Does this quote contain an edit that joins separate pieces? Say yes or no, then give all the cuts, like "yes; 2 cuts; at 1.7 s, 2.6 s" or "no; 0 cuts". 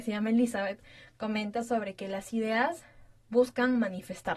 no; 0 cuts